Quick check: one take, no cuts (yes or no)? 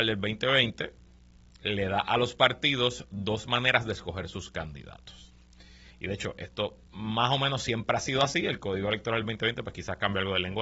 no